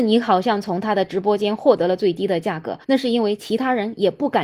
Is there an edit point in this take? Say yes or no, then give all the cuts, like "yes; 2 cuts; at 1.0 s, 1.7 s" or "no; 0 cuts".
yes; 1 cut; at 2.8 s